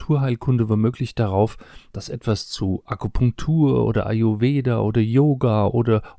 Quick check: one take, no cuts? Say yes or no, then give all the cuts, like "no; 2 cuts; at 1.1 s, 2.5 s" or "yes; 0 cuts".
yes; 0 cuts